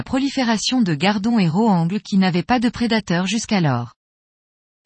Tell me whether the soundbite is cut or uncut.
uncut